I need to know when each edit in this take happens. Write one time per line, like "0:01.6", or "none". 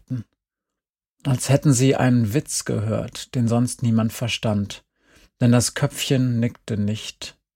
none